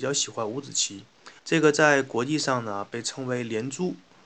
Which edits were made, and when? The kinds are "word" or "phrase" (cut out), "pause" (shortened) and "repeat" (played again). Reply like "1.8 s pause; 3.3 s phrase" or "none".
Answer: 1.4 s pause

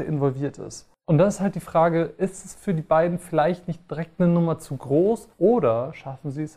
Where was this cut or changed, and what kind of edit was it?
5.3 s pause

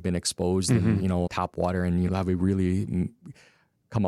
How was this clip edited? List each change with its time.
1.3 s word; 2.1 s word

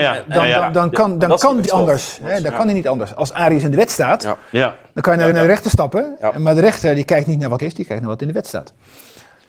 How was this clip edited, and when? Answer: 1.7 s word; 5.3 s repeat; 7.6 s word

